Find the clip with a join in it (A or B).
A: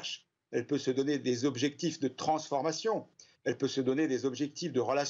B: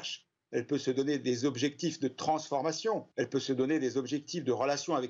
B